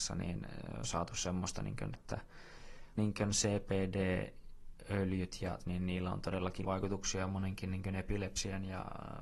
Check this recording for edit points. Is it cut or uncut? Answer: cut